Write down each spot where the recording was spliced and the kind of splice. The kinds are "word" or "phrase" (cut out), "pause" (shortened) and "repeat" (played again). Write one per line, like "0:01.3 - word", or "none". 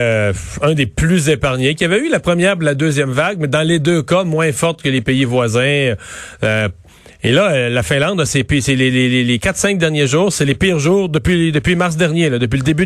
none

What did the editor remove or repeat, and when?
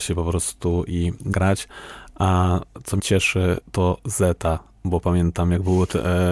0:01.3 - word
0:03.0 - word
0:03.6 - word

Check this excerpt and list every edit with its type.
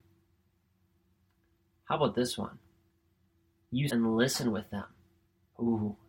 0:03.9 - word

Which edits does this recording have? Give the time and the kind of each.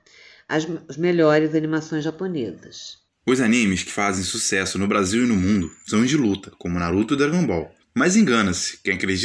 0:03.9 - word

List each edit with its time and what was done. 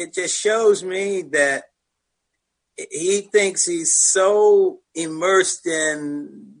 0:04.8 - pause

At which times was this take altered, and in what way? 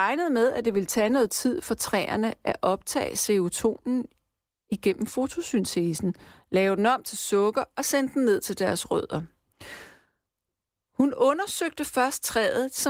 none

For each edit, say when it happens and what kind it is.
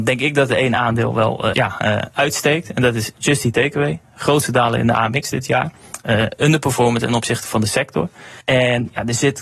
0:01.5 - word
0:08.4 - pause

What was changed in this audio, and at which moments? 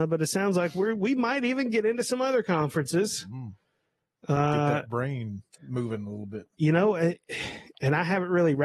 0:05.5 - pause
0:06.5 - pause

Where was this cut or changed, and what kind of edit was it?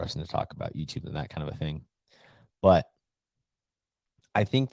0:01.0 - word

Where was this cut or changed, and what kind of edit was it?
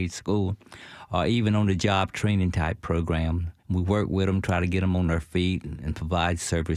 0:03.6 - pause

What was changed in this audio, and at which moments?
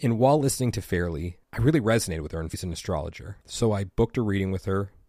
0:01.4 - pause
0:02.5 - word
0:03.4 - pause

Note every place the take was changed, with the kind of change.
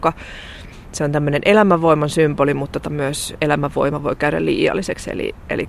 0:02.8 - word

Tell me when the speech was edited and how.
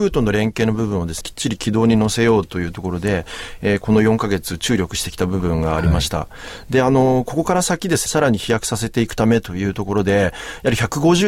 0:01.2 - word
0:08.1 - word

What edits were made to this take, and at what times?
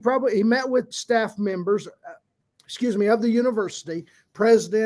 0:00.9 - word
0:02.4 - pause

